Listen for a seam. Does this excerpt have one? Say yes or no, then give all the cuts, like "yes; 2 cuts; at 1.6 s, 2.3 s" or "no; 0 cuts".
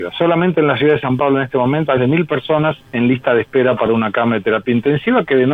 yes; 2 cuts; at 2.0 s, 2.9 s